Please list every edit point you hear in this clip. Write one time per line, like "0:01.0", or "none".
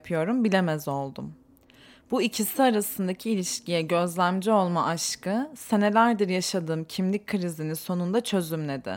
none